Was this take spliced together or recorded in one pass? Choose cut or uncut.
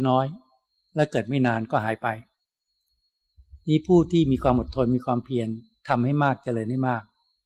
cut